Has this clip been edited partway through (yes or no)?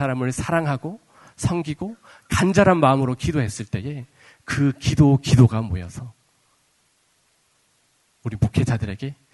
no